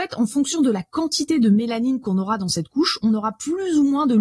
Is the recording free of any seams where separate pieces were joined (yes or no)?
yes